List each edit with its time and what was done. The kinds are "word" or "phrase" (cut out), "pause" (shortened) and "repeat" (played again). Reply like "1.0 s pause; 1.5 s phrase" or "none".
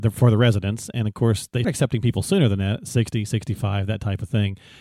1.6 s word